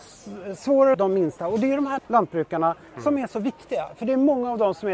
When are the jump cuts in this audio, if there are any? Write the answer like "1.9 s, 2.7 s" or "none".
0.9 s, 2.0 s